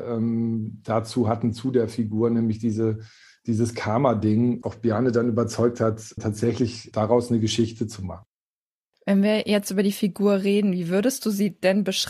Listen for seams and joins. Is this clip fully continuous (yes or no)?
no